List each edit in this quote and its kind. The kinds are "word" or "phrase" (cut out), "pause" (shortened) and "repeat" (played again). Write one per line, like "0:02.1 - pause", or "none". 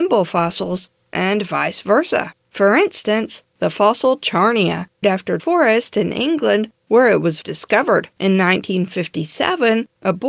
0:02.4 - pause
0:05.0 - word
0:05.4 - word
0:07.4 - word
0:08.1 - pause